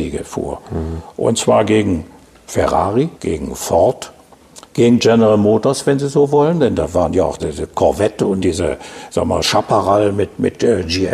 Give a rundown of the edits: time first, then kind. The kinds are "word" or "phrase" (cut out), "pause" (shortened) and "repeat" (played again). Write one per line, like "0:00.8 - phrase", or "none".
0:03.1 - pause
0:04.7 - pause
0:07.4 - word
0:08.4 - phrase